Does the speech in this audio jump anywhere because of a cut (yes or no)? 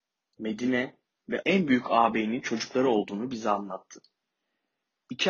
yes